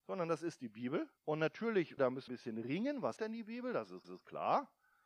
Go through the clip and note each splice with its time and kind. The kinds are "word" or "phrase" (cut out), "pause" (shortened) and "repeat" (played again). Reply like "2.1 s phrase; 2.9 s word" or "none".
1.2 s pause; 2.0 s word; 2.3 s word; 3.2 s word; 4.0 s repeat